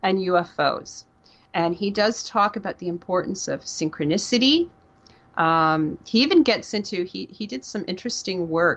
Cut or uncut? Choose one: uncut